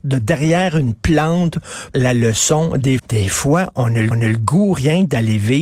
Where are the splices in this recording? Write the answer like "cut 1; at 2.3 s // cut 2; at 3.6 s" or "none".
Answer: cut 1; at 1.9 s // cut 2; at 3.0 s // cut 3; at 4.1 s